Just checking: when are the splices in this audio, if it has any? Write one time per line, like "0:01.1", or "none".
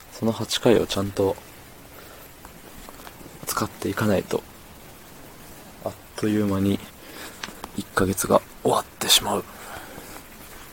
0:05.8